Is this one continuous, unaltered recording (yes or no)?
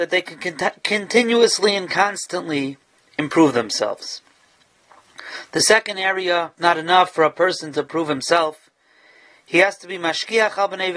no